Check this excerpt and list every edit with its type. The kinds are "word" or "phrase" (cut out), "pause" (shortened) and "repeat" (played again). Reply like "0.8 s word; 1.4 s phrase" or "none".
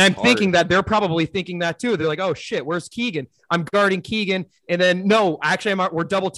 none